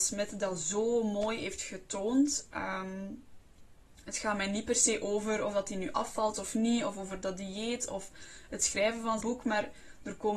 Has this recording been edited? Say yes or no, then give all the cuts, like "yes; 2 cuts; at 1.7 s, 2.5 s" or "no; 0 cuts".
yes; 1 cut; at 9.2 s